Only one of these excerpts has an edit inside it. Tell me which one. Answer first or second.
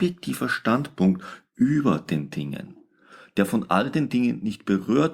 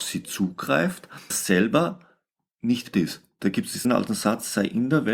second